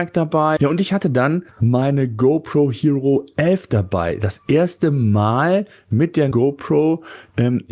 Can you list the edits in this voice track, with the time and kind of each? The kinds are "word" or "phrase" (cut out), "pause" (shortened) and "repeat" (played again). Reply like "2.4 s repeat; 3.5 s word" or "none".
1.5 s pause; 6.3 s word